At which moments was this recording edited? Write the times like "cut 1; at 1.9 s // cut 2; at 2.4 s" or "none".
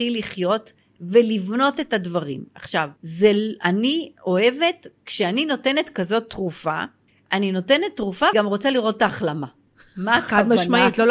cut 1; at 3.0 s // cut 2; at 4.2 s // cut 3; at 7.1 s // cut 4; at 8.3 s